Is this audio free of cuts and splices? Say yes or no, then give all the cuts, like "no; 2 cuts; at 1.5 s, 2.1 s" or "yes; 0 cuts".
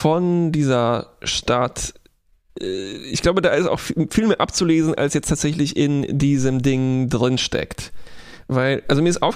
yes; 0 cuts